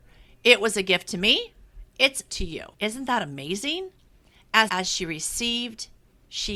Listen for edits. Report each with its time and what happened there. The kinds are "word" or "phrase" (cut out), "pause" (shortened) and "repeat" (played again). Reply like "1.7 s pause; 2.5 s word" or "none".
2.3 s phrase; 2.7 s pause; 4.7 s word